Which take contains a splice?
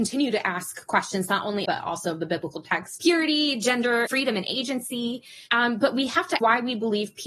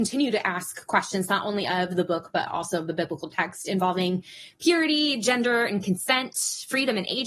first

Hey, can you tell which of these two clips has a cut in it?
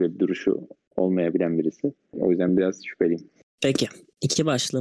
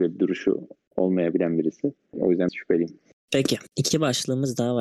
second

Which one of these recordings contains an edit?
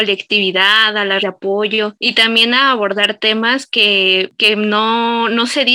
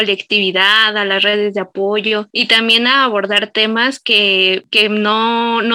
first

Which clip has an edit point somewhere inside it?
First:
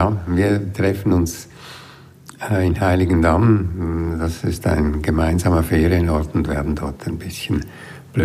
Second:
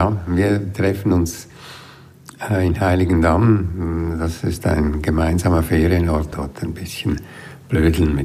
second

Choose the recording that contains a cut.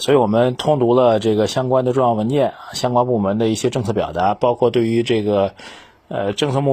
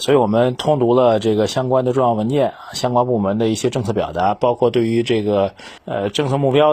second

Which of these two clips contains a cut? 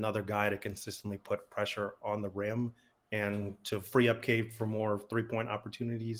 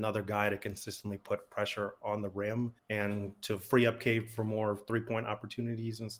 second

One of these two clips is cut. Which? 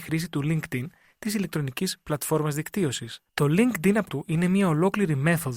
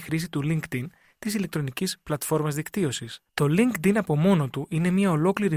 first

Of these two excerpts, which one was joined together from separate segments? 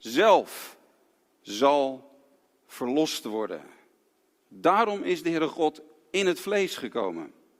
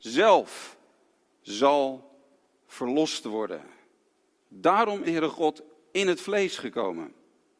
second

